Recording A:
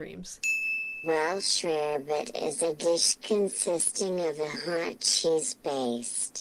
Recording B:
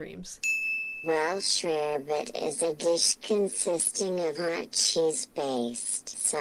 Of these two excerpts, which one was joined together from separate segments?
B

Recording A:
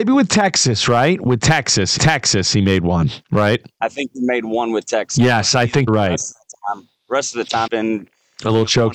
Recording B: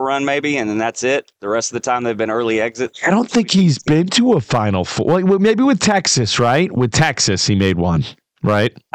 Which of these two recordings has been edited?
A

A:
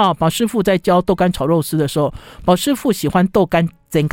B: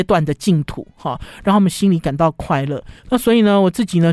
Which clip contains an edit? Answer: B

